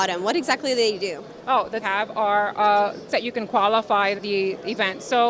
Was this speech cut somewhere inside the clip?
yes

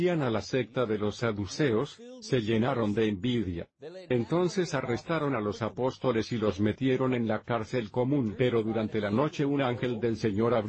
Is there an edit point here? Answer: no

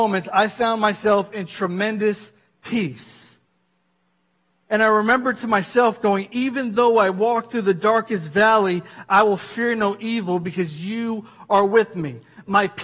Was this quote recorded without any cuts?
yes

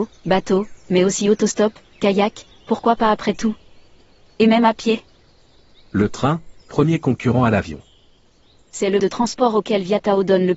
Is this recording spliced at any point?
yes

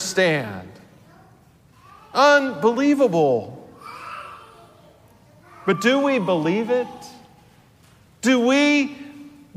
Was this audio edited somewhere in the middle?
no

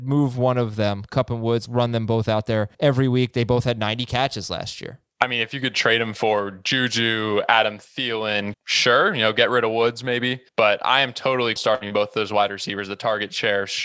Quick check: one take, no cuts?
no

